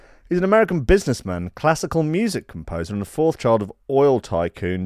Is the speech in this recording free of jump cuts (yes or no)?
yes